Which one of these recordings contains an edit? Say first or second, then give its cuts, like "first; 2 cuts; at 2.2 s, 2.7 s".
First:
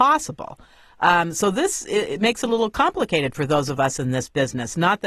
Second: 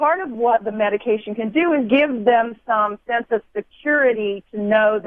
second; 1 cut; at 1.9 s